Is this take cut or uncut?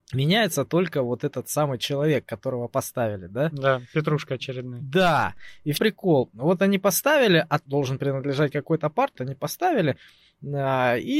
cut